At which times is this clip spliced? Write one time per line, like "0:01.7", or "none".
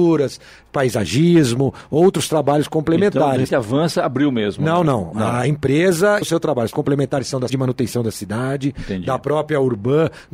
0:03.5
0:06.2
0:06.7
0:07.5